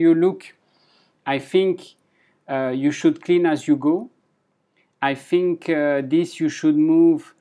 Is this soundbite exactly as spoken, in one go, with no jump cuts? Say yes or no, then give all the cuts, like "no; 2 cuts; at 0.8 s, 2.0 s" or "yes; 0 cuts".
yes; 0 cuts